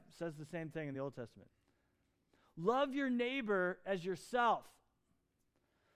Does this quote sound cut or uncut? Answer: uncut